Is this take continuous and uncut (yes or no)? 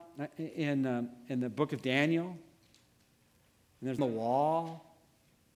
no